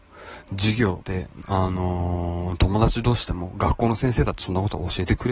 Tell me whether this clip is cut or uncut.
cut